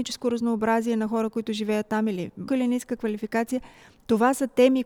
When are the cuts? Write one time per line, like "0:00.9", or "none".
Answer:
0:02.5